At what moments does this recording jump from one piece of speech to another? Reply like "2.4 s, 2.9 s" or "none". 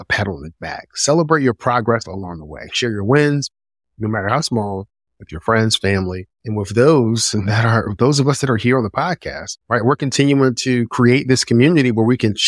6.3 s, 9.6 s